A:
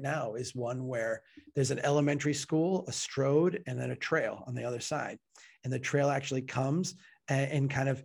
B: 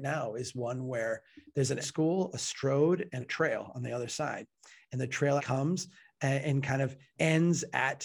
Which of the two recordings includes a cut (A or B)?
B